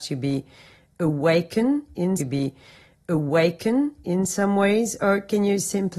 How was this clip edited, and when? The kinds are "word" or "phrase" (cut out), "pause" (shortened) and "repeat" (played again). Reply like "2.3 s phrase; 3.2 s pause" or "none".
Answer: 2.2 s repeat